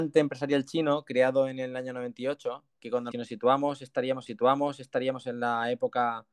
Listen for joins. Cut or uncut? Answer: cut